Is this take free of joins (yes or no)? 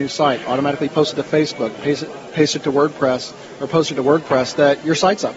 yes